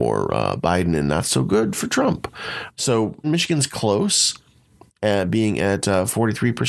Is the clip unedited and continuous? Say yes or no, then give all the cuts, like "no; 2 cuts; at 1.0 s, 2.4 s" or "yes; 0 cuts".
no; 1 cut; at 3.2 s